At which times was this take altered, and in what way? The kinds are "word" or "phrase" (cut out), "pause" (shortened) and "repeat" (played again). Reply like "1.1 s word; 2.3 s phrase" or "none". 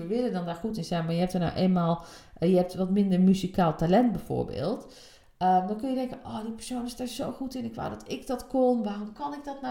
none